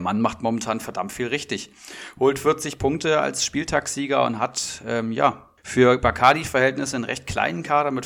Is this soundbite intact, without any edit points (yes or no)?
no